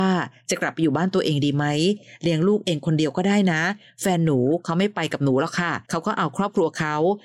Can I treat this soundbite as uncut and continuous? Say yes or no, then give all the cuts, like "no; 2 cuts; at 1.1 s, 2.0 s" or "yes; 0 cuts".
no; 1 cut; at 5.8 s